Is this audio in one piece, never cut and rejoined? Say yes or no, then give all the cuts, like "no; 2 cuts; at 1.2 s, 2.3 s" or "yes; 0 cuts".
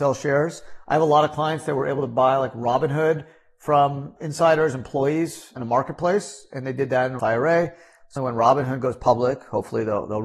no; 4 cuts; at 4.2 s, 5.6 s, 7.2 s, 8.2 s